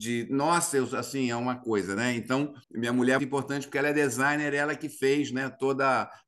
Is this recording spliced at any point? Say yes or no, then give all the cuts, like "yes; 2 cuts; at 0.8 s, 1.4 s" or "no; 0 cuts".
yes; 2 cuts; at 2.6 s, 3.2 s